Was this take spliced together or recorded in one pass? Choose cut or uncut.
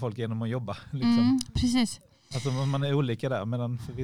uncut